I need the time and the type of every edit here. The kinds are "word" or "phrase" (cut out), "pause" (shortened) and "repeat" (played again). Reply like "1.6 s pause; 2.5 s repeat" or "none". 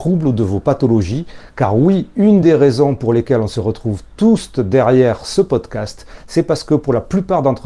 none